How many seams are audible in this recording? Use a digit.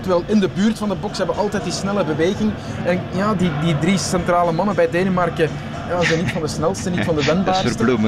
0